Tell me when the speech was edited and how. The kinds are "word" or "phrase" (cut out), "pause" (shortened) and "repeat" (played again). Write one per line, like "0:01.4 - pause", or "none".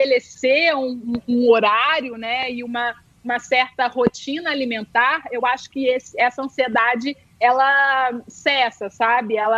none